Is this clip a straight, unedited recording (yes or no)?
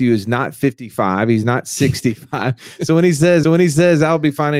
no